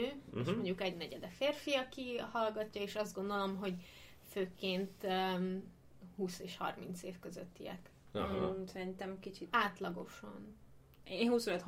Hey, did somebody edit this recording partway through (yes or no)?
no